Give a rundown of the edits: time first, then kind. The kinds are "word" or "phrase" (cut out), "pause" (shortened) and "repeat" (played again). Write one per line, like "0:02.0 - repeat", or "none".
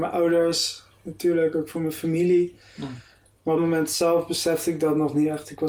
0:03.6 - phrase